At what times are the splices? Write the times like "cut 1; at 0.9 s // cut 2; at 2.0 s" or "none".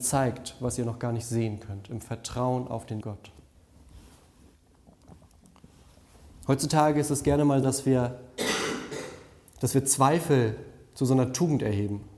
cut 1; at 3.0 s // cut 2; at 7.6 s